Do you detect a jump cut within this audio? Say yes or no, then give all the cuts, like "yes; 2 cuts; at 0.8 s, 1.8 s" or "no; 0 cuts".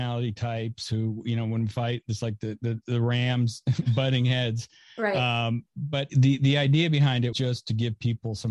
yes; 2 cuts; at 6.1 s, 7.3 s